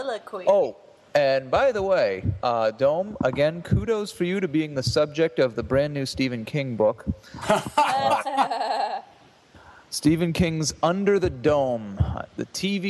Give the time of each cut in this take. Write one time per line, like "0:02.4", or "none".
none